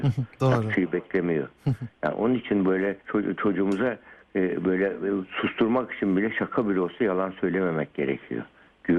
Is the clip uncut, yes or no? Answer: no